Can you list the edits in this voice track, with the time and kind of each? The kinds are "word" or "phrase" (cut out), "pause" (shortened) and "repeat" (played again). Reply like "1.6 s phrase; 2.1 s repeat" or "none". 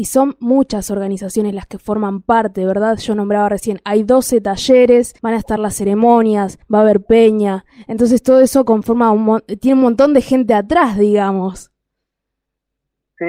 5.2 s pause; 6.6 s pause